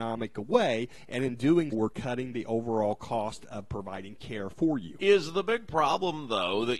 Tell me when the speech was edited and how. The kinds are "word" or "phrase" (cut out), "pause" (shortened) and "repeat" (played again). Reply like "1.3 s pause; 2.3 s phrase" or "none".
1.7 s word